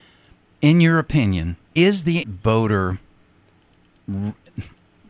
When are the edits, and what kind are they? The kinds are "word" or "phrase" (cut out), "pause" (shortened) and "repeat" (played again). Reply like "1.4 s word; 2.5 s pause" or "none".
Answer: 1.6 s pause; 2.2 s word